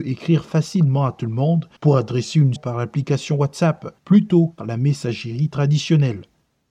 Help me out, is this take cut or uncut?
cut